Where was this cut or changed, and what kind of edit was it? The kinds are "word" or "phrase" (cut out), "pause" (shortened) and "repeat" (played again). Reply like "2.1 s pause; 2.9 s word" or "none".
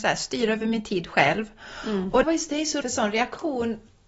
2.2 s phrase; 2.8 s word